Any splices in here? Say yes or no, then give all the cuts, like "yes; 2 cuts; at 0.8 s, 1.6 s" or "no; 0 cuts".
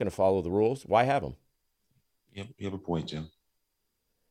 no; 0 cuts